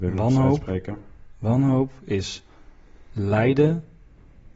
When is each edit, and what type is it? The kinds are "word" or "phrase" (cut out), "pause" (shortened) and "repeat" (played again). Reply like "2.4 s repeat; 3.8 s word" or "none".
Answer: none